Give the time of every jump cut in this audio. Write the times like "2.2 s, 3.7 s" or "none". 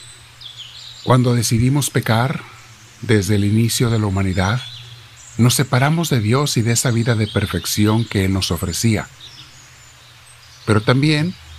none